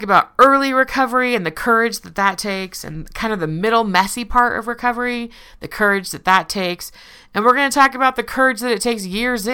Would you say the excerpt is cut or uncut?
uncut